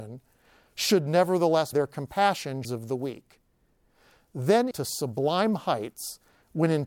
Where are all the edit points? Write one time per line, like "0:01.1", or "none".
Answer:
0:01.7
0:02.6
0:04.7

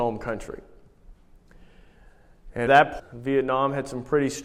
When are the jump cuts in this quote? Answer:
0:02.7
0:03.0

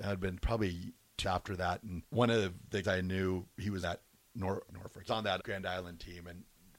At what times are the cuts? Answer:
0:01.2
0:02.0
0:02.8
0:03.8
0:04.7
0:05.1
0:05.4

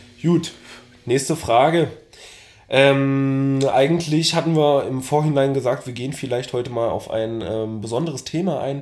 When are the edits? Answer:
none

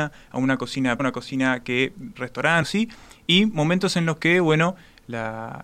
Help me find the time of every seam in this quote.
0:01.0
0:02.2
0:02.6

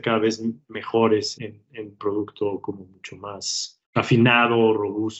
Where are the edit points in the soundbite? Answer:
0:01.3
0:02.0
0:03.8

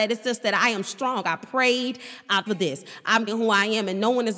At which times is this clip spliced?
0:02.5
0:03.3

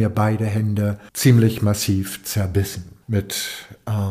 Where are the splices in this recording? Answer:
0:01.1

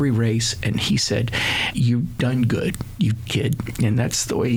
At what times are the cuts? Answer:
0:01.7
0:02.1
0:03.3

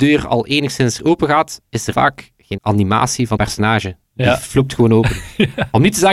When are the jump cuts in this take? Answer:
0:01.0
0:01.9
0:02.6
0:03.4

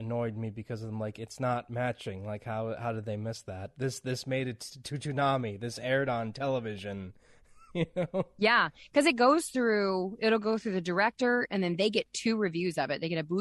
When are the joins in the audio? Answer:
none

